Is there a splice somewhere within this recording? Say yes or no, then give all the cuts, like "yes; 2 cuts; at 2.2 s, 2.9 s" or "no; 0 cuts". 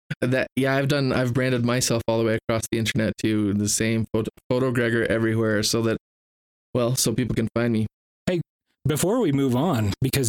no; 0 cuts